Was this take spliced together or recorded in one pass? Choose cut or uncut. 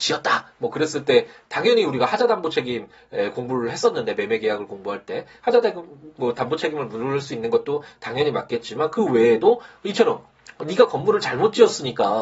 uncut